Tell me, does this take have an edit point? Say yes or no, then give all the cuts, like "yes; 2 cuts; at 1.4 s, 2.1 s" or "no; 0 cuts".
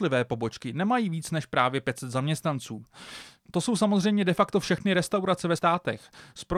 yes; 1 cut; at 5.6 s